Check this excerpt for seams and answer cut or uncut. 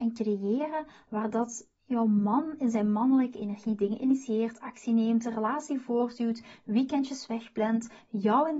uncut